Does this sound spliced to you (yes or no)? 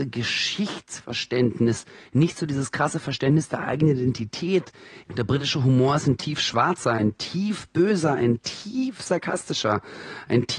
no